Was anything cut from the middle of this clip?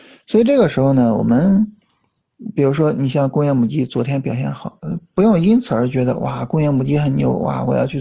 no; 0 cuts

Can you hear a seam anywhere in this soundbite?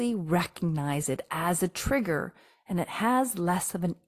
no; 0 cuts

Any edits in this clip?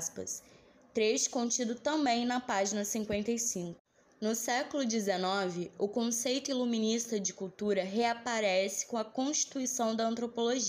no; 0 cuts

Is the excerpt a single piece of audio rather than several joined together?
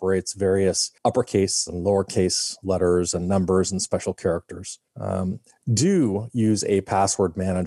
no; 2 cuts; at 1.0 s, 4.9 s

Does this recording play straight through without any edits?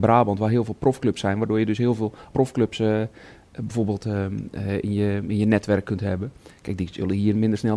no; 1 cut; at 2.3 s

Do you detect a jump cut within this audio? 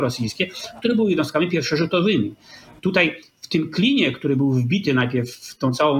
no; 0 cuts

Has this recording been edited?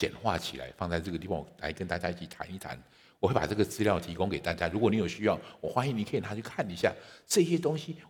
no; 0 cuts

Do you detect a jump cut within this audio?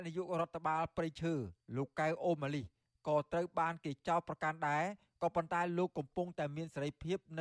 no; 0 cuts

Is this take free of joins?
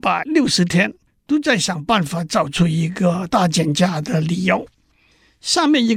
yes; 0 cuts

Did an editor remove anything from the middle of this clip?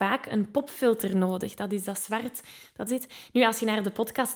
yes; 1 cut; at 2.9 s

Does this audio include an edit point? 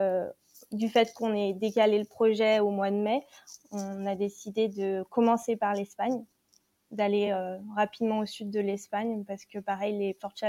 no; 0 cuts

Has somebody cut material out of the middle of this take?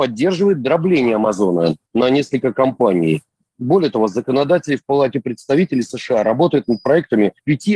yes; 1 cut; at 1.8 s

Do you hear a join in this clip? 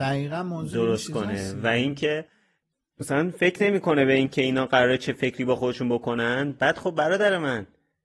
no; 0 cuts

